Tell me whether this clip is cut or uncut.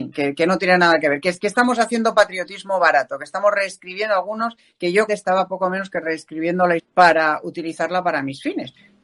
cut